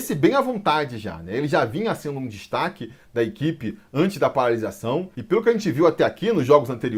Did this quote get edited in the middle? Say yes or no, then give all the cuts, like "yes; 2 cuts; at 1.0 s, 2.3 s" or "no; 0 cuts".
no; 0 cuts